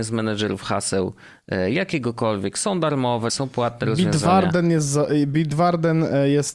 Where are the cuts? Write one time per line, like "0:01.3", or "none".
0:03.3